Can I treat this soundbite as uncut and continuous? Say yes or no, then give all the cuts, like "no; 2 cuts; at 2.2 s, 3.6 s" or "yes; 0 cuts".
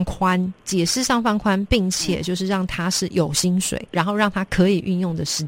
no; 1 cut; at 3.9 s